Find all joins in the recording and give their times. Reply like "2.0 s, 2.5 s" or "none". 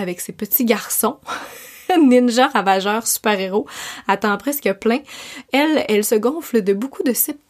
none